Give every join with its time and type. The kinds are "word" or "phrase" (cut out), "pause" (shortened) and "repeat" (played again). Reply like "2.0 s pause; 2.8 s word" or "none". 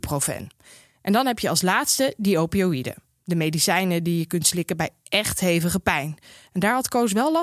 none